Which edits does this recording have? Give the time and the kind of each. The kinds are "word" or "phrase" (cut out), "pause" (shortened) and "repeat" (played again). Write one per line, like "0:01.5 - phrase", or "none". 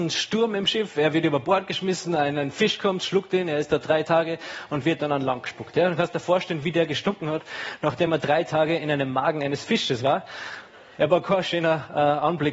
none